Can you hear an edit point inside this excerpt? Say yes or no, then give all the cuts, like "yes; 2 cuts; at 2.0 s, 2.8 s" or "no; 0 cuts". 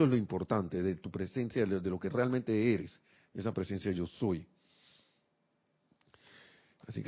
no; 0 cuts